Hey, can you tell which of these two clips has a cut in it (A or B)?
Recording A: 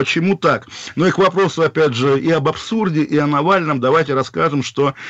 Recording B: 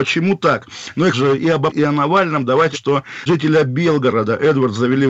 B